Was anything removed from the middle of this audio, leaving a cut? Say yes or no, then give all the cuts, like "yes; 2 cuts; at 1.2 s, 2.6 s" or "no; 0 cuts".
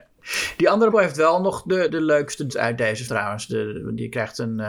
yes; 4 cuts; at 0.9 s, 1.9 s, 2.5 s, 3.1 s